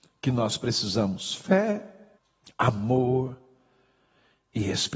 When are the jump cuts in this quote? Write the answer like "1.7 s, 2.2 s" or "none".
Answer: 2.2 s